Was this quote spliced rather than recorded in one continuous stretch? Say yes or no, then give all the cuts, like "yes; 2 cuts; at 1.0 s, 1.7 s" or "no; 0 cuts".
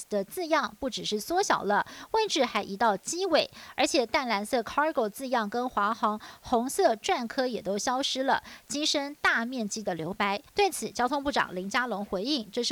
yes; 1 cut; at 10.5 s